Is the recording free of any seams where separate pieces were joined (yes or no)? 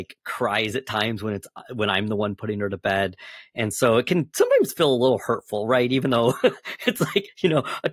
yes